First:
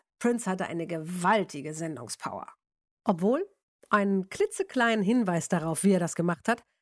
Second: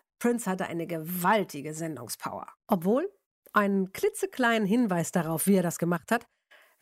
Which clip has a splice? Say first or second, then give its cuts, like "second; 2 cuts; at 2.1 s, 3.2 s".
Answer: second; 1 cut; at 2.6 s